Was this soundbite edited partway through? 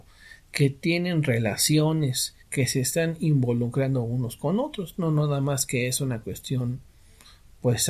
yes; 1 cut; at 2.4 s

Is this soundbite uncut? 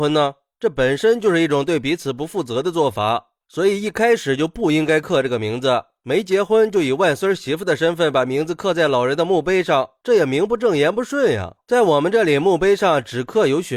yes; 0 cuts

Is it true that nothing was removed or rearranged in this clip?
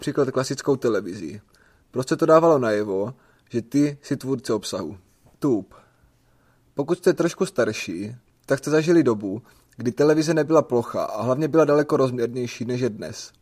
yes; 0 cuts

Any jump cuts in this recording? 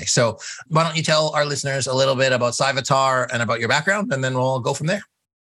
no; 0 cuts

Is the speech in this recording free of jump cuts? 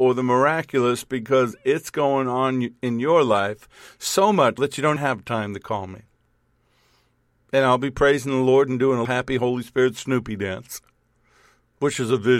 no; 3 cuts; at 4.6 s, 5.0 s, 9.0 s

